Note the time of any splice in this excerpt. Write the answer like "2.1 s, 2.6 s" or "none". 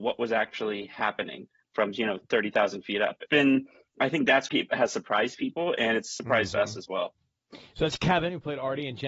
3.3 s, 4.5 s